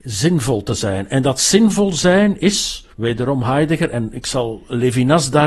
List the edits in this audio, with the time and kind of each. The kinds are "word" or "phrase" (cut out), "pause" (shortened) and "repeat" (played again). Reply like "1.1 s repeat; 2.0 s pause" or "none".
2.9 s pause